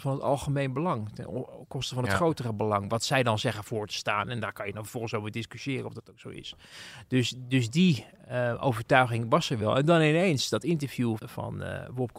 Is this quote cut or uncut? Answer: cut